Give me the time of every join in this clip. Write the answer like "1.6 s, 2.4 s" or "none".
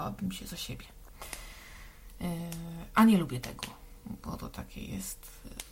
none